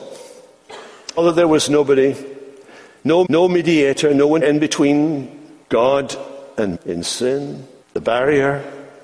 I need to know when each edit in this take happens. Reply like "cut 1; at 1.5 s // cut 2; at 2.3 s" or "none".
cut 1; at 1.2 s // cut 2; at 3.2 s // cut 3; at 4.4 s // cut 4; at 5.6 s // cut 5; at 6.7 s // cut 6; at 7.8 s